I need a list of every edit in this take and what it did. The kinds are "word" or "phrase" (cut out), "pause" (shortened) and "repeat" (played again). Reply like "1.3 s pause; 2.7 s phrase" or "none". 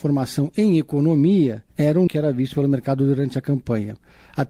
1.7 s pause; 2.1 s word